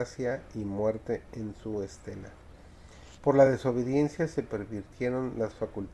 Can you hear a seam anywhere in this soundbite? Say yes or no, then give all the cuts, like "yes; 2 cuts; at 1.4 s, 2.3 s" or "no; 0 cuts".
no; 0 cuts